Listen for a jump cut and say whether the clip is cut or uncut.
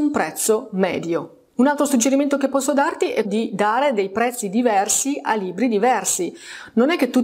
cut